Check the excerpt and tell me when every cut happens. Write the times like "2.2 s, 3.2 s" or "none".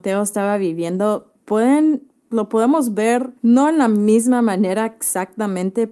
1.4 s, 3.4 s